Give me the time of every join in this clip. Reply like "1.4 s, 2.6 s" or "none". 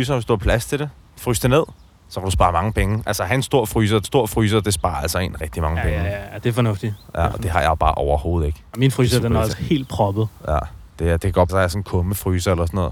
1.9 s, 4.0 s, 5.4 s, 7.3 s, 9.5 s, 10.9 s, 11.5 s